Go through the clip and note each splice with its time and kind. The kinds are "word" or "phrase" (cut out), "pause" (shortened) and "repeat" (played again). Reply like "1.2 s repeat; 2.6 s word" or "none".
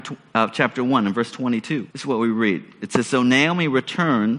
1.9 s pause